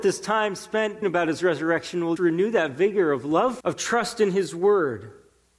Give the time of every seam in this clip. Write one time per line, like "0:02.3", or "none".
0:01.0
0:02.2
0:03.6